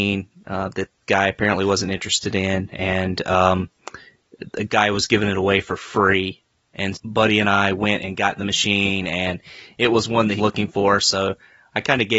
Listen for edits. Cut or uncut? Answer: cut